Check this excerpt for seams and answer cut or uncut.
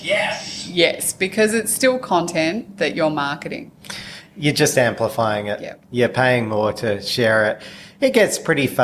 uncut